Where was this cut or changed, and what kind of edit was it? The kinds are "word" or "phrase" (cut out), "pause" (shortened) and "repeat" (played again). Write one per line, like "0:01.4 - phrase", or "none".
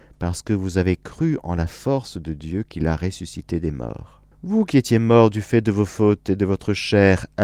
0:04.3 - pause